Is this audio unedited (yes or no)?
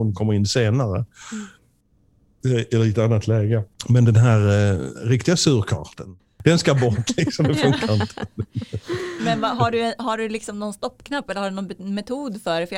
no